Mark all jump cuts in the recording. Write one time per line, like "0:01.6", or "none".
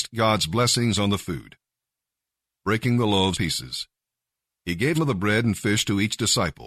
0:03.3
0:04.9